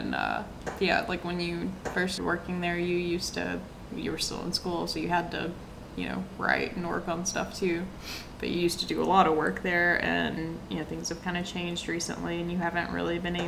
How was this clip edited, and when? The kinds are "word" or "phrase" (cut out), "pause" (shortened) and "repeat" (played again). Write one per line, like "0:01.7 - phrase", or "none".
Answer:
0:02.2 - word
0:03.9 - word